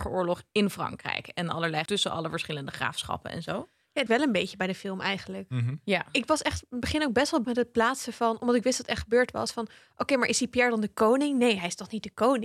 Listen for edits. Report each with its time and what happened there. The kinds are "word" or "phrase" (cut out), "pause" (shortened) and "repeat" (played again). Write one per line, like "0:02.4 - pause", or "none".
0:01.9 - word
0:04.1 - phrase
0:07.4 - word